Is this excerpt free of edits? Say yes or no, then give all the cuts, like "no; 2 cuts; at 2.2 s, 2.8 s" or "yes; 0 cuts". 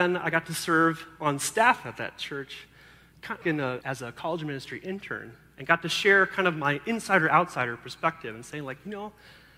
no; 2 cuts; at 3.4 s, 3.8 s